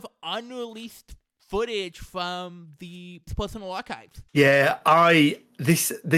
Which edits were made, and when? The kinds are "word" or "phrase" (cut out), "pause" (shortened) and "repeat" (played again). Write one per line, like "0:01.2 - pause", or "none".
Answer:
0:03.3 - word
0:04.3 - pause